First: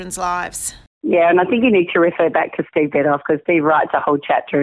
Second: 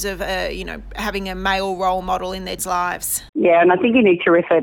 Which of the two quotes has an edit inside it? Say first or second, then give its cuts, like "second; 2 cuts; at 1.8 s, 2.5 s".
second; 2 cuts; at 2.6 s, 3.3 s